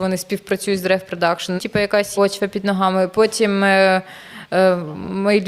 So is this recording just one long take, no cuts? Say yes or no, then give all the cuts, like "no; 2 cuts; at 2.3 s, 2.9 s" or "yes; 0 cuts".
no; 2 cuts; at 1.6 s, 2.1 s